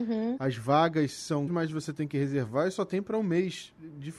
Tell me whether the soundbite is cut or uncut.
cut